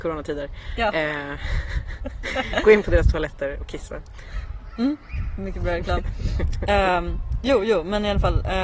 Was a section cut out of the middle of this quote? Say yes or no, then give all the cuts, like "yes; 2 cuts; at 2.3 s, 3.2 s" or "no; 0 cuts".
no; 0 cuts